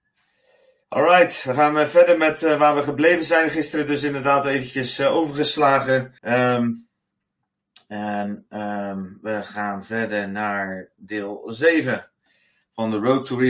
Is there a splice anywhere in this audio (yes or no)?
yes